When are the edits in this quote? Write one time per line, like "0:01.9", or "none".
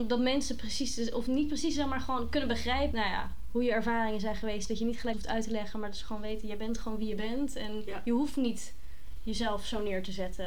0:02.9
0:05.1